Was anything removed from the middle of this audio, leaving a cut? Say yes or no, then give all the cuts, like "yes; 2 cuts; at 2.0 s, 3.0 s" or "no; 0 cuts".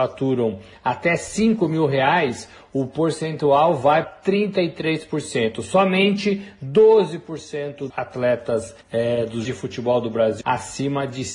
yes; 5 cuts; at 4.0 s, 7.9 s, 8.8 s, 9.4 s, 10.4 s